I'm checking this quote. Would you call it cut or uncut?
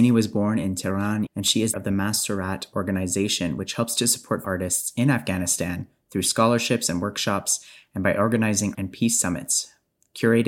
cut